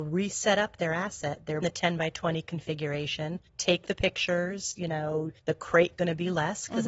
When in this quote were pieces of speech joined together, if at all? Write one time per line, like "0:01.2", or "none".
0:01.6
0:03.5
0:05.4
0:06.0

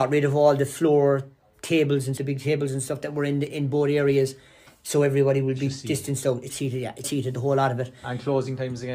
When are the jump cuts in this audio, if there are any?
0:02.2
0:03.5
0:06.5
0:07.0

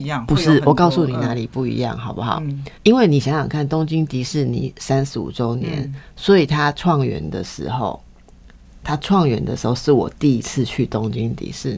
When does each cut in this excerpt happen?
0:02.7

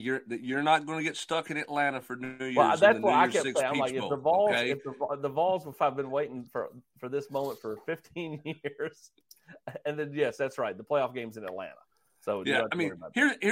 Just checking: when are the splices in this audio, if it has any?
none

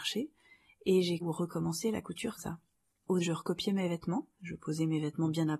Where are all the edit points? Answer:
0:01.2
0:02.4
0:03.2
0:04.3

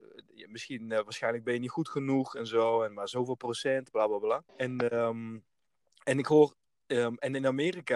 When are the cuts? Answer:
0:04.5

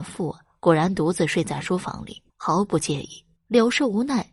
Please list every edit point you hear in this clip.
0:02.3
0:03.4

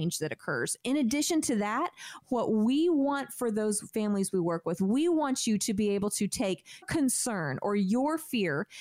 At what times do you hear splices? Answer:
0:06.8

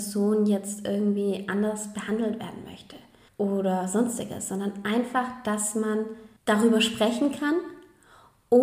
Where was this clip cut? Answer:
0:03.3
0:06.4

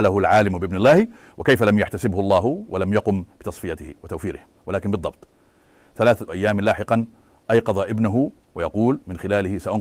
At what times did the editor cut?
none

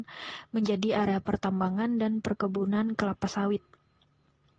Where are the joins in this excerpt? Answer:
none

